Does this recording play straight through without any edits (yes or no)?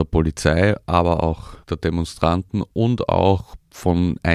no